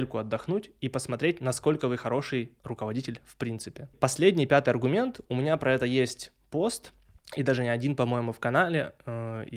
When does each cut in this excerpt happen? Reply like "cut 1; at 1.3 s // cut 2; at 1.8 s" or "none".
cut 1; at 2.6 s // cut 2; at 7.2 s